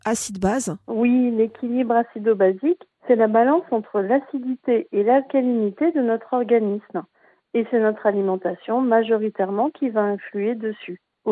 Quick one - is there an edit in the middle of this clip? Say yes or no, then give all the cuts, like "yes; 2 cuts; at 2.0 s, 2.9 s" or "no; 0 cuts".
no; 0 cuts